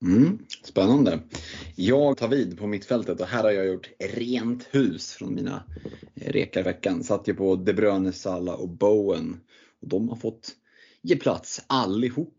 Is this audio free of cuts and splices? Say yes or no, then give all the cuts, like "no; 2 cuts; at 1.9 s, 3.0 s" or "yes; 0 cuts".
no; 2 cuts; at 2.1 s, 6.7 s